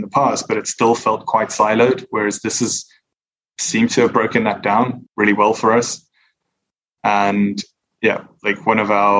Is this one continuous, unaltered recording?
yes; 0 cuts

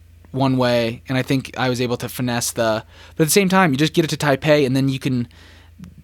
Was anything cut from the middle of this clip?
no; 0 cuts

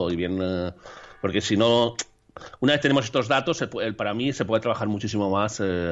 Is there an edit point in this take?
no; 0 cuts

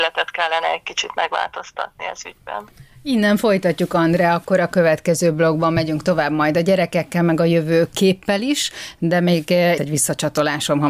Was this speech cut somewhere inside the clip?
yes; 1 cut; at 9.8 s

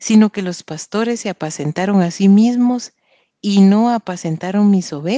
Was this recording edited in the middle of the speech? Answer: no; 0 cuts

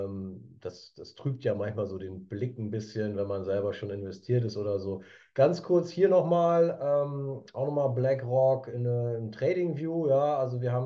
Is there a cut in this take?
no; 0 cuts

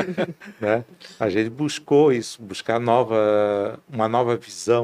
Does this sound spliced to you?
no; 0 cuts

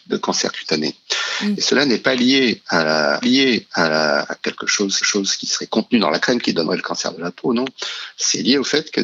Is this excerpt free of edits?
no; 2 cuts; at 3.2 s, 5.0 s

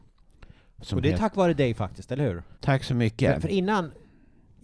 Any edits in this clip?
yes; 1 cut; at 2.6 s

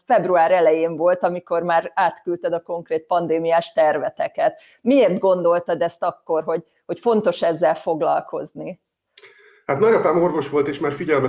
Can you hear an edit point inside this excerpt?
no; 0 cuts

